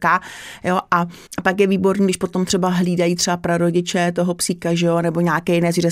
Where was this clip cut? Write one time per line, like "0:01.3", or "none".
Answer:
0:01.3

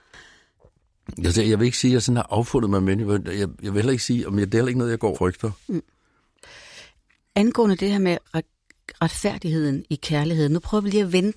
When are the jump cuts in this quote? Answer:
0:05.1

